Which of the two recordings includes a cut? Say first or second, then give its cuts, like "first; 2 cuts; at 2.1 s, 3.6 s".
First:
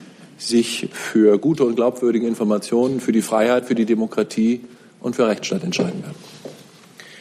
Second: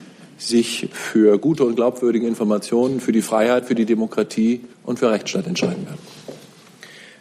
second; 1 cut; at 4.7 s